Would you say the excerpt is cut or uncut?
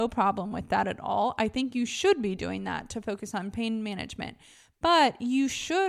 uncut